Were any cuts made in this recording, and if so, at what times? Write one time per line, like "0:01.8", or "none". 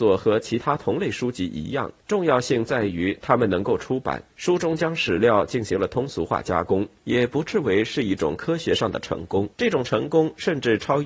0:02.0
0:04.3
0:07.0
0:09.5